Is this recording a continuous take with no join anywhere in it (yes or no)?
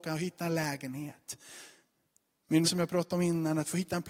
no